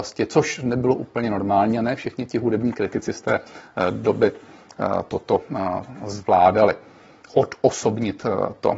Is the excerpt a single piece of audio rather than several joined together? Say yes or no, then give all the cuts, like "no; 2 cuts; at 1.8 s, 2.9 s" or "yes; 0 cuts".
yes; 0 cuts